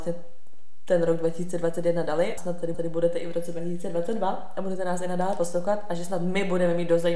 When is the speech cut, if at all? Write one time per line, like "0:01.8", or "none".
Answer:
0:02.4
0:02.7